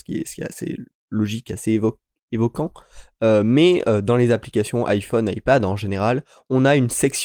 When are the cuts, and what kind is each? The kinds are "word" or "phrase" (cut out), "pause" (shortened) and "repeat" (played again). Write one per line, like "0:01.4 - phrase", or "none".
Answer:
none